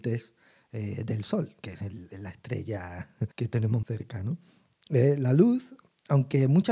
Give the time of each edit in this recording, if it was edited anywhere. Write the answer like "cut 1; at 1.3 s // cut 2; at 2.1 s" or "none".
cut 1; at 1.6 s // cut 2; at 3.3 s // cut 3; at 3.8 s